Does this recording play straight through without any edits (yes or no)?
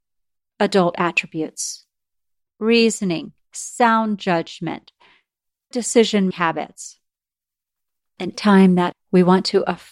no